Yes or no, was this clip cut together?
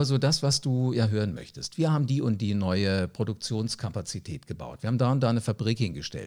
no